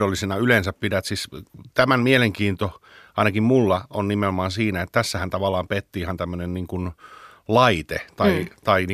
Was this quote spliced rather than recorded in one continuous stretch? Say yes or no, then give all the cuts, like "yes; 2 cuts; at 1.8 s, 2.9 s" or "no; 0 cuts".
no; 0 cuts